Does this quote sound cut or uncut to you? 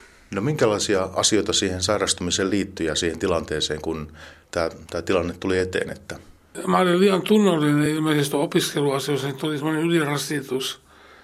uncut